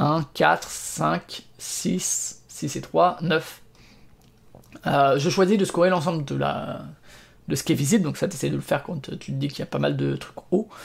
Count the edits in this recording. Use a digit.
0